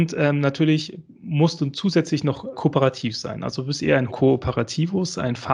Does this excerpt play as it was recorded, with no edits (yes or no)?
no